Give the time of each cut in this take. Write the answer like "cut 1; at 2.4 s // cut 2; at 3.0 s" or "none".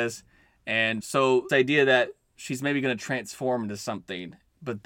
cut 1; at 1.0 s // cut 2; at 1.5 s